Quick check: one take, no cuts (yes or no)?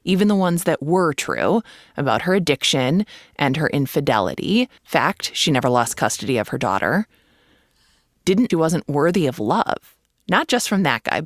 no